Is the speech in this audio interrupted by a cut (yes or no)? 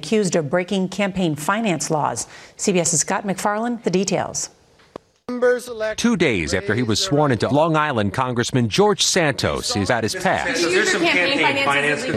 yes